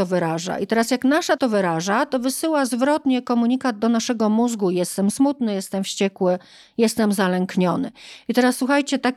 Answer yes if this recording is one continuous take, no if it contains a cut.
no